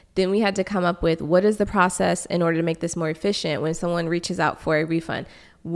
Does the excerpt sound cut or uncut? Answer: uncut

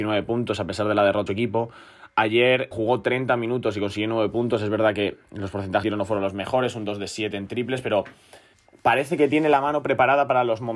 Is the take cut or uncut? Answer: cut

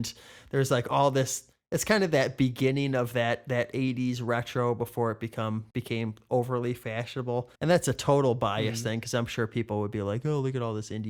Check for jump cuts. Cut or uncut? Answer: cut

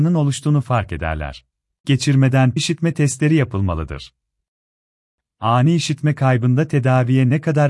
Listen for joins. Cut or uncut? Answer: cut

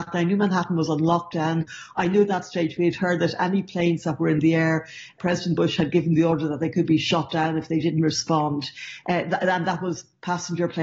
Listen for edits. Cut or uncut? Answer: uncut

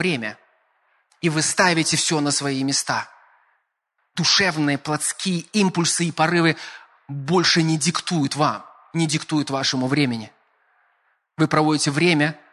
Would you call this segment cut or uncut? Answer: uncut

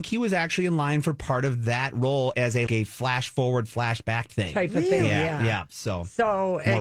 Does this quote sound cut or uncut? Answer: cut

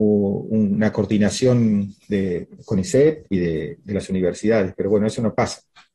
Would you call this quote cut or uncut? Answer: uncut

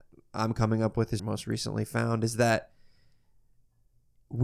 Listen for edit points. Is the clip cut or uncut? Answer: cut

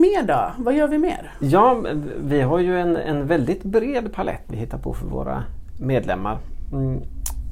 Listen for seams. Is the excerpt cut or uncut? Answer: cut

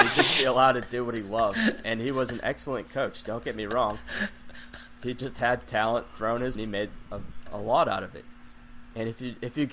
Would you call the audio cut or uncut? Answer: cut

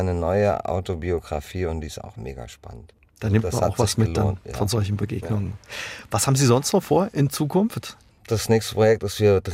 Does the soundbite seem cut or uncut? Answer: uncut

